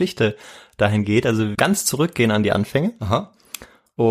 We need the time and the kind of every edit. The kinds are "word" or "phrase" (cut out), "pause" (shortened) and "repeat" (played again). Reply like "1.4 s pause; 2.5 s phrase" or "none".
1.5 s word